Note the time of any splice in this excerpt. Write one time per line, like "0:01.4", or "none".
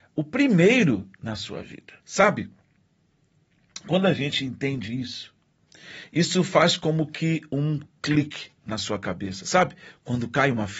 0:02.0